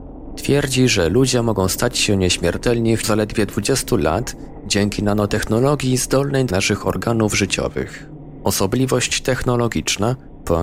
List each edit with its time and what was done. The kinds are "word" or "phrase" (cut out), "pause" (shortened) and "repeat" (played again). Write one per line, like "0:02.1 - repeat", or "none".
0:03.0 - word
0:06.5 - word